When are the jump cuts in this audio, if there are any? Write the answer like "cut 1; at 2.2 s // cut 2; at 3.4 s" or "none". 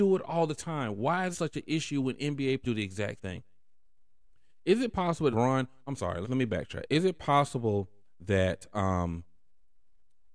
cut 1; at 1.3 s // cut 2; at 2.6 s // cut 3; at 3.2 s // cut 4; at 5.3 s // cut 5; at 6.2 s